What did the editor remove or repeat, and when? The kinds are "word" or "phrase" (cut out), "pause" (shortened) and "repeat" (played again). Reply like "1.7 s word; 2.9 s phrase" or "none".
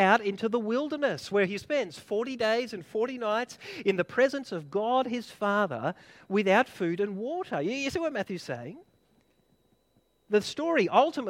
none